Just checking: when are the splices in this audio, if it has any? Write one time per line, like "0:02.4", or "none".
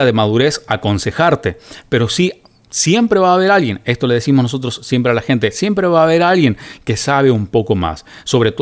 none